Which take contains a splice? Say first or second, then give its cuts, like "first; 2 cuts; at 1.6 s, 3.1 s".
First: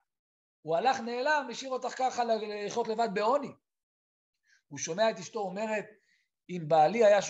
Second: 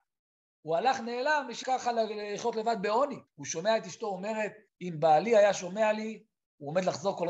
second; 3 cuts; at 1.6 s, 3.3 s, 4.7 s